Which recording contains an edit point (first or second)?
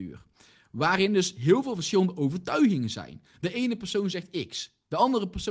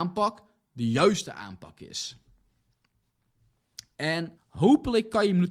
second